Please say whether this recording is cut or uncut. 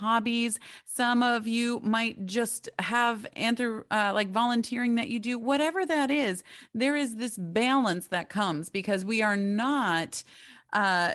uncut